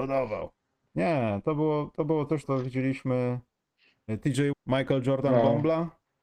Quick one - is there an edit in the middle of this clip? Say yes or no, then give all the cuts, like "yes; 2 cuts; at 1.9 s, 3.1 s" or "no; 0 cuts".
yes; 2 cuts; at 2.4 s, 4.5 s